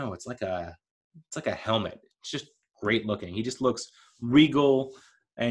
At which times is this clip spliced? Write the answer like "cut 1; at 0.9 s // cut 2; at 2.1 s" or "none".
none